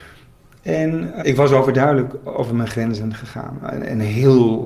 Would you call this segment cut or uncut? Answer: cut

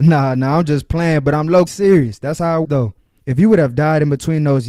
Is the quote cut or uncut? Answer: cut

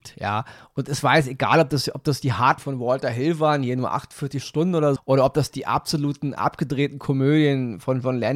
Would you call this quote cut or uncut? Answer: cut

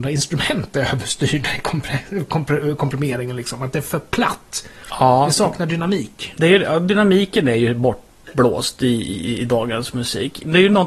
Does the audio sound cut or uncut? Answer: uncut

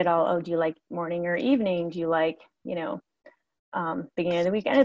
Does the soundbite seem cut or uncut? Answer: uncut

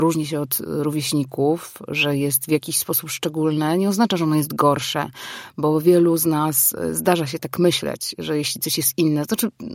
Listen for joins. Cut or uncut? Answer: uncut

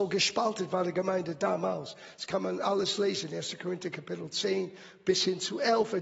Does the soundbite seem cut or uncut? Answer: uncut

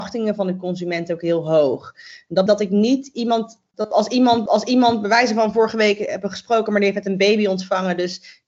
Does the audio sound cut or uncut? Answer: cut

